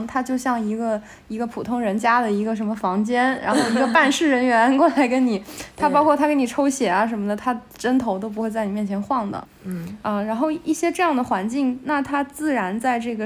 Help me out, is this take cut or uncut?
uncut